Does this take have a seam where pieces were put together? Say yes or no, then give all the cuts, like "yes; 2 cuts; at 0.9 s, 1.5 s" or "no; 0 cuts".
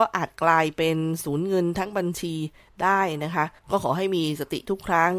yes; 1 cut; at 3.6 s